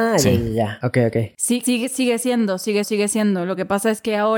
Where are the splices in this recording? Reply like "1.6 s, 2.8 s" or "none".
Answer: 1.6 s, 2.8 s